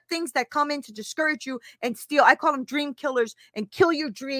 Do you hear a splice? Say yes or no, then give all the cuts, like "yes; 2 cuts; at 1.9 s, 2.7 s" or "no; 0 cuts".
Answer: no; 0 cuts